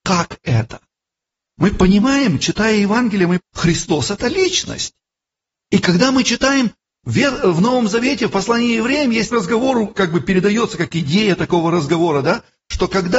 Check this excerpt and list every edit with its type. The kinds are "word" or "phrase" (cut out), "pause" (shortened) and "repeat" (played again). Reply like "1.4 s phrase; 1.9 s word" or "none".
3.4 s word; 9.3 s word; 10.0 s word

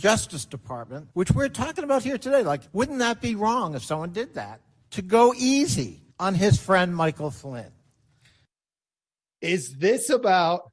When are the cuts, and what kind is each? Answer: 1.1 s pause; 2.7 s pause; 4.8 s pause; 6.1 s pause

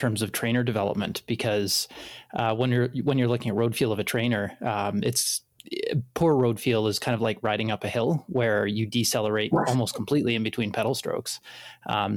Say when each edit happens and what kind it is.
none

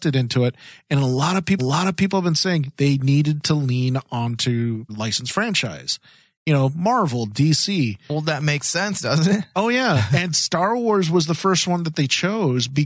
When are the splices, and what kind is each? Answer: 1.6 s repeat; 4.9 s word

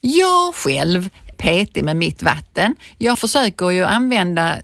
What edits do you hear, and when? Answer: 1.3 s word; 3.1 s word

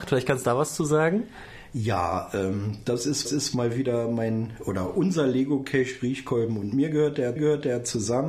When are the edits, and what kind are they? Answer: 3.2 s repeat; 7.4 s repeat

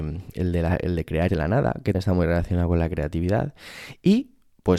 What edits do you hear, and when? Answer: 1.3 s word; 1.9 s word

